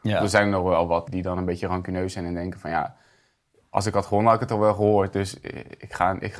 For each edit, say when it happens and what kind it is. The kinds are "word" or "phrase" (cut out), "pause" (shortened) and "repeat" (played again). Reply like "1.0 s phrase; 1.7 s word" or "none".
1.1 s word